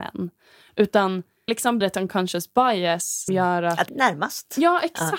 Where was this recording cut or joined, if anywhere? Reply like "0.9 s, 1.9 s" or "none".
1.5 s, 1.8 s, 3.3 s, 3.9 s